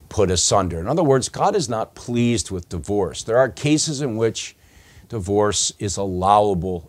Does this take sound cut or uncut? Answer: uncut